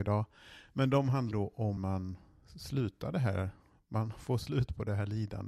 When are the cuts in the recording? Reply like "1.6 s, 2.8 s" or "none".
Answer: 1.3 s, 1.8 s